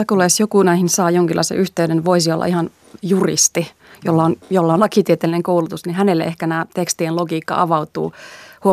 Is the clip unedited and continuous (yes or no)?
yes